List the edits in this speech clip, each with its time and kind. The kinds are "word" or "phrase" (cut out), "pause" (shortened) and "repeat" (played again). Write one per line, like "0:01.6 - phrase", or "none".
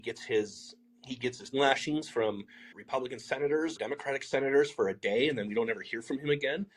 0:01.5 - word
0:02.7 - word
0:03.8 - word